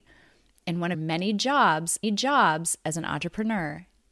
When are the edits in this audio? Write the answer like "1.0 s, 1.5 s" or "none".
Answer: 0.9 s, 2.0 s